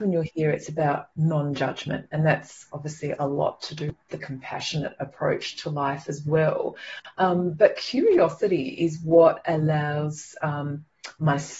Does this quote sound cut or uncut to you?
uncut